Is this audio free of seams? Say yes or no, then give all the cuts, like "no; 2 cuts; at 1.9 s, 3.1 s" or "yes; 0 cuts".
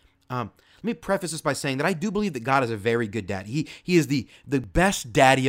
yes; 0 cuts